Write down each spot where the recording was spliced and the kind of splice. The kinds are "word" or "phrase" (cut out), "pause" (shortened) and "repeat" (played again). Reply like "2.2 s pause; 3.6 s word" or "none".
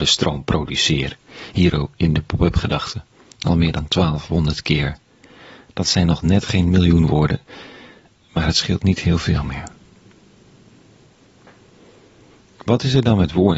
none